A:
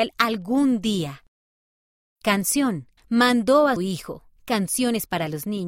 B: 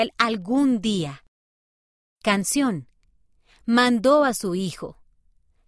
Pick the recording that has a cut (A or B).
A